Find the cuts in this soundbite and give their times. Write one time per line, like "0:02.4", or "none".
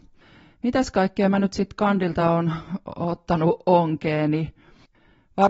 none